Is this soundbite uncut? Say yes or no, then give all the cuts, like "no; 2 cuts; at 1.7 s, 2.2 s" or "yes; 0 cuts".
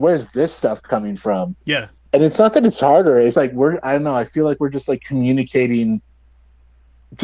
no; 1 cut; at 3.3 s